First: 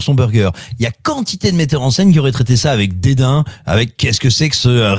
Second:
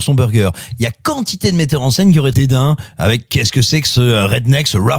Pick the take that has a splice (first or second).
second